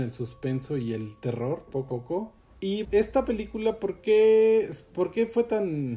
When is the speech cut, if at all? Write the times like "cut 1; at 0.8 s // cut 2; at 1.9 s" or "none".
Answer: cut 1; at 1.9 s // cut 2; at 2.8 s

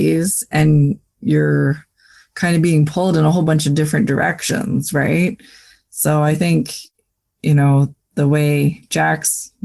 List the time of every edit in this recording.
none

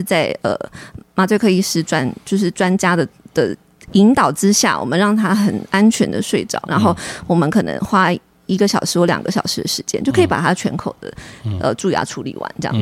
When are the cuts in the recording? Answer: none

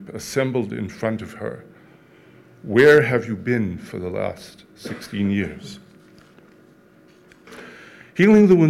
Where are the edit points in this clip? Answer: none

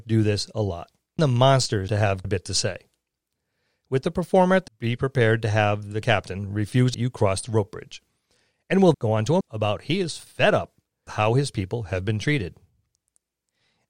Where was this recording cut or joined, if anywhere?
cut 1; at 1.2 s // cut 2; at 1.9 s // cut 3; at 2.2 s // cut 4; at 4.7 s // cut 5; at 6.0 s // cut 6; at 6.9 s // cut 7; at 8.9 s // cut 8; at 9.4 s // cut 9; at 11.1 s

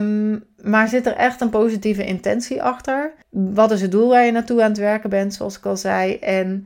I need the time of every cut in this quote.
cut 1; at 3.2 s

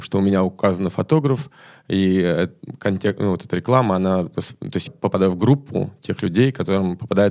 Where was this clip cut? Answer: cut 1; at 4.9 s

